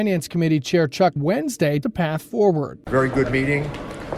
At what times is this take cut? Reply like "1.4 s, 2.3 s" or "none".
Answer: 1.2 s, 1.8 s